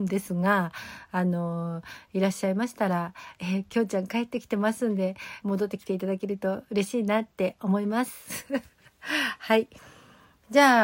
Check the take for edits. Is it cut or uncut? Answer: cut